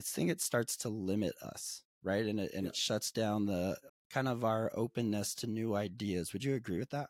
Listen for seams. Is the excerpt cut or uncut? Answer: cut